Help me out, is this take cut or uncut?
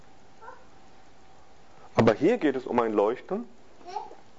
uncut